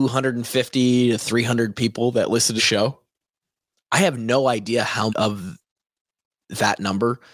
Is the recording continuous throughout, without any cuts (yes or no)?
no